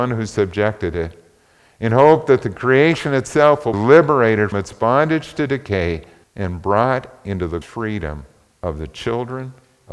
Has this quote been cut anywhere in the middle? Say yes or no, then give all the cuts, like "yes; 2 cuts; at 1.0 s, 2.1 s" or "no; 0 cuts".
yes; 4 cuts; at 3.7 s, 4.5 s, 6.2 s, 7.6 s